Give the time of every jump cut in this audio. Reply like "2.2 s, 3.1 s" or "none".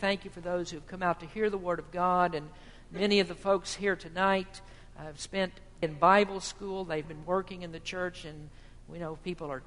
5.8 s, 7.0 s